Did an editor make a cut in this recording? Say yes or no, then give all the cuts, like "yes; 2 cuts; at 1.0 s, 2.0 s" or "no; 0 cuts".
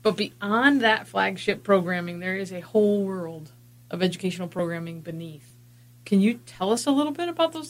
no; 0 cuts